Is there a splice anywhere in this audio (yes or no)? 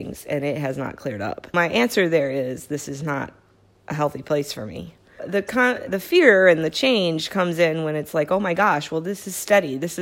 yes